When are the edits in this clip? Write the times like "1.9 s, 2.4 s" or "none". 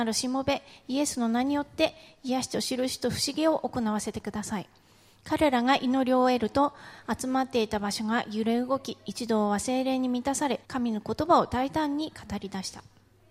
10.6 s